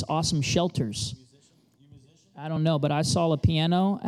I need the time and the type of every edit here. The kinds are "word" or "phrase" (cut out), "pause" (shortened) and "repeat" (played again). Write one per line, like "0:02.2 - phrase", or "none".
none